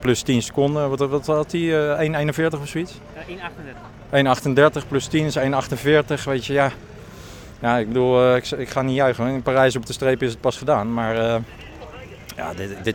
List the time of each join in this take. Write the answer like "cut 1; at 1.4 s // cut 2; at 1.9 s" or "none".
none